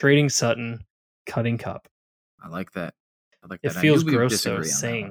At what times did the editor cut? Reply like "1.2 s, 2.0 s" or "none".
none